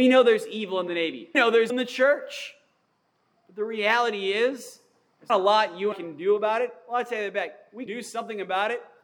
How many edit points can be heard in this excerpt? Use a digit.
5